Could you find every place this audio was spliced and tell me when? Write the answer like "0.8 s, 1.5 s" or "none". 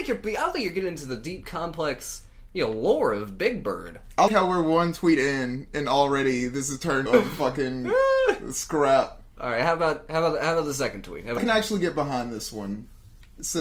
4.3 s, 7.1 s, 11.4 s